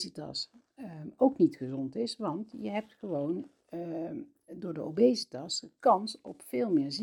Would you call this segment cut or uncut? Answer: uncut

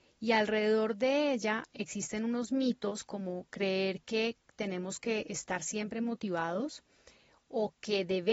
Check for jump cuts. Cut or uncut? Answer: uncut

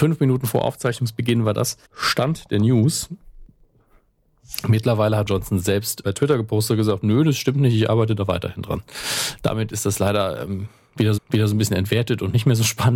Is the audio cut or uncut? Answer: cut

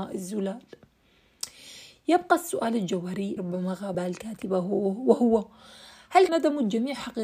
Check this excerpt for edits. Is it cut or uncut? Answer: cut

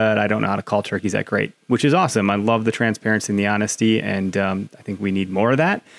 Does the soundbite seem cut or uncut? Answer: uncut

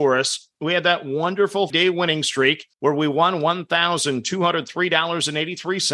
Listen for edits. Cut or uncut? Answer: cut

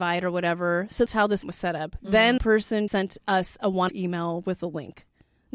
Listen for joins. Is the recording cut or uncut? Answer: cut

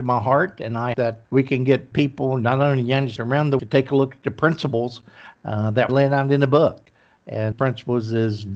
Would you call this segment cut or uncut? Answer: cut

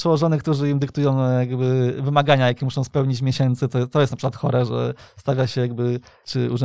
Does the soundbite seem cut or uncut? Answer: uncut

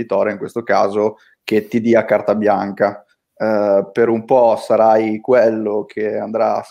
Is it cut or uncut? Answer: uncut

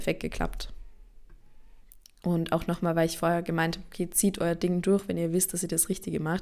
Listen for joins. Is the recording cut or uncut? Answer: uncut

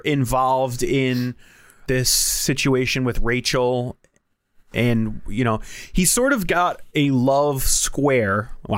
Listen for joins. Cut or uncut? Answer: cut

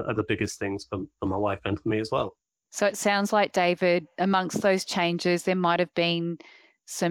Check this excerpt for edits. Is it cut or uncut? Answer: uncut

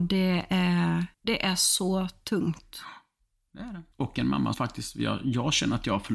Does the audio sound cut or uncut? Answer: cut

